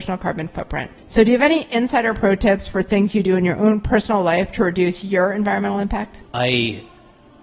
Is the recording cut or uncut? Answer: cut